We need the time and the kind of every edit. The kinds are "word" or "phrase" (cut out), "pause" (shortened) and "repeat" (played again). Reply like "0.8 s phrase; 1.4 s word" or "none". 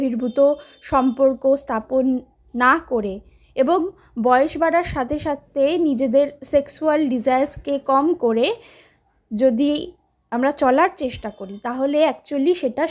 none